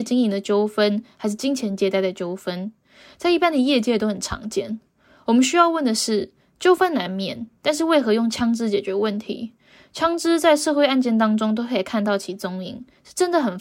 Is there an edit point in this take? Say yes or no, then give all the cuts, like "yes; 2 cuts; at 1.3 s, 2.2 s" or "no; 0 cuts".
no; 0 cuts